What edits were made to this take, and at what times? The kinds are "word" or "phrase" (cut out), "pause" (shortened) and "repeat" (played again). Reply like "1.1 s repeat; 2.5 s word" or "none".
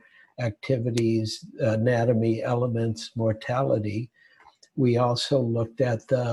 none